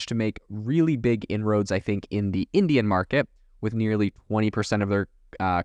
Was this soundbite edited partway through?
no; 0 cuts

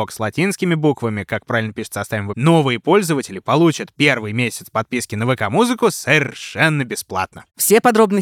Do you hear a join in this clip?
yes; 1 cut; at 2.3 s

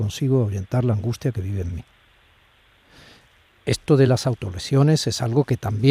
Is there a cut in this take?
no; 0 cuts

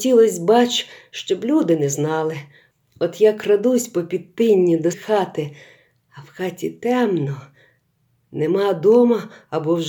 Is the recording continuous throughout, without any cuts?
no; 1 cut; at 4.9 s

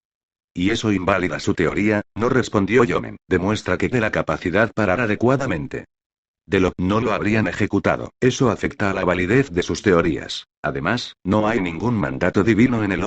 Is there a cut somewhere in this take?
yes; 7 cuts; at 2.1 s, 3.2 s, 3.9 s, 5.0 s, 6.7 s, 8.2 s, 10.5 s

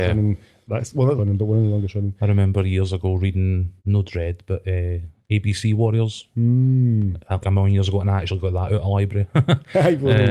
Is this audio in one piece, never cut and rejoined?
no; 3 cuts; at 1.2 s, 3.8 s, 7.4 s

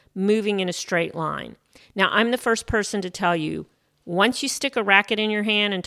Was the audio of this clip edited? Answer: no; 0 cuts

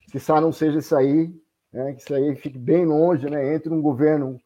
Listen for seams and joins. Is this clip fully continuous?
yes; 0 cuts

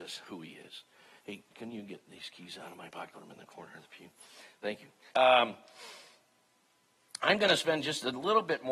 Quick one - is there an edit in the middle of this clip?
yes; 2 cuts; at 3.1 s, 5.1 s

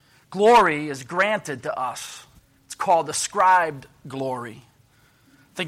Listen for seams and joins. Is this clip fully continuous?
no; 1 cut; at 2.4 s

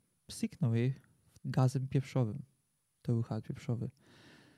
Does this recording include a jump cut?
yes; 2 cuts; at 1.4 s, 3.4 s

